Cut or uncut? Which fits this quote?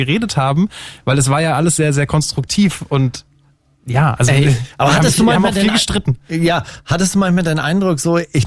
uncut